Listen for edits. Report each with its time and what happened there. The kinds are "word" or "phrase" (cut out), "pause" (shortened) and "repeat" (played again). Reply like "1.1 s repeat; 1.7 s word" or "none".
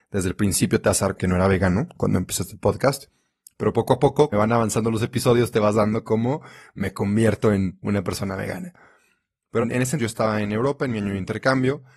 1.1 s word; 4.3 s word; 6.0 s word; 9.6 s word; 10.0 s word